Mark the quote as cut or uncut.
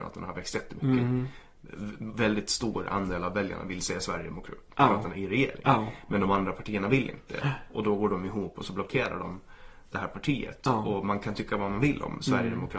uncut